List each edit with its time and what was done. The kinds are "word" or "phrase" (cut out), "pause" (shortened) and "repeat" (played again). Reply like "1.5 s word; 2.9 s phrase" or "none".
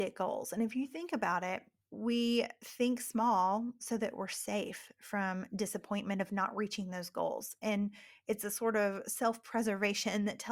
none